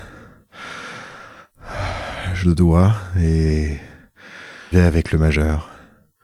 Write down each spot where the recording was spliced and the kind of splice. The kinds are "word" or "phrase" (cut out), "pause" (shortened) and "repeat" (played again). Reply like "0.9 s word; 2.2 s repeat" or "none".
2.4 s word; 4.7 s word